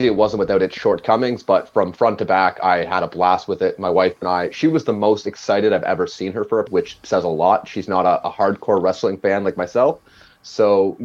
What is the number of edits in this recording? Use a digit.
1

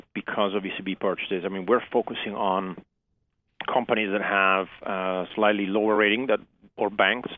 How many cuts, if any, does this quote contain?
0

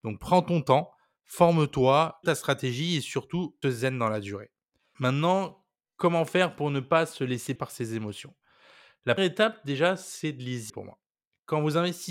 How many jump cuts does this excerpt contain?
5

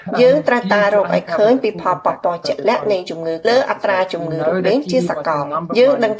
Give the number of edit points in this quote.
1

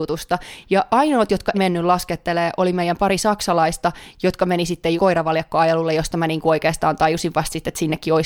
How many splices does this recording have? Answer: 2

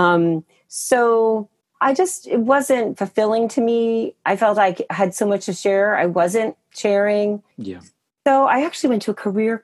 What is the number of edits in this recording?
2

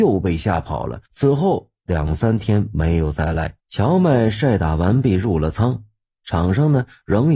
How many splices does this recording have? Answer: 2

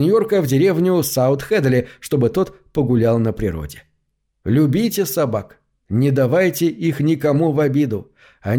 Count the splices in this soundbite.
0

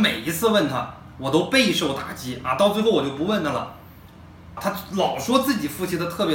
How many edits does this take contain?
1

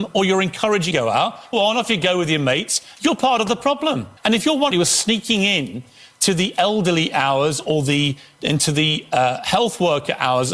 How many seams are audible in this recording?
4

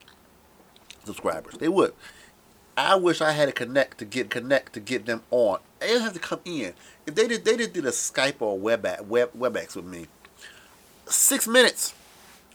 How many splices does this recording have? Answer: 3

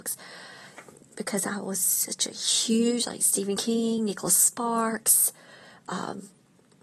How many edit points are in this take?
0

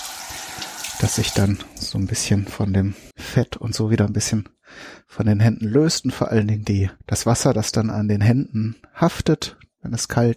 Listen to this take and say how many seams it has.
2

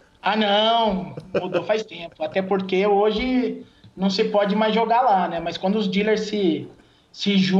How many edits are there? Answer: 0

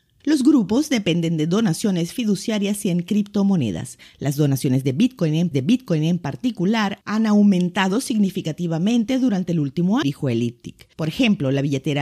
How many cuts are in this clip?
2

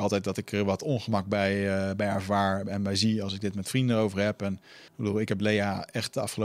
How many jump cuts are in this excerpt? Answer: 1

